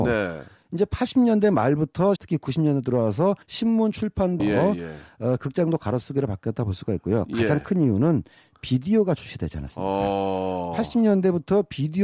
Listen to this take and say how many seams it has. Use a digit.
3